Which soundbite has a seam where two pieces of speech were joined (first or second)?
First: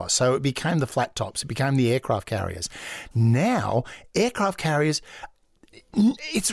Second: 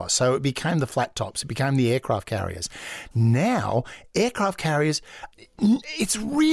second